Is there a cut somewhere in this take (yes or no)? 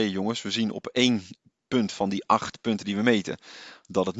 no